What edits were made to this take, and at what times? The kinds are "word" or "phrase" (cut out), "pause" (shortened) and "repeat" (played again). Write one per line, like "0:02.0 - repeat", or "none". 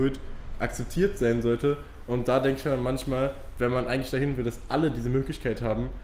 none